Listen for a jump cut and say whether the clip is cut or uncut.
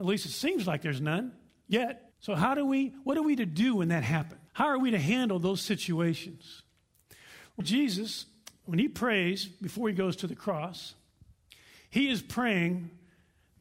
cut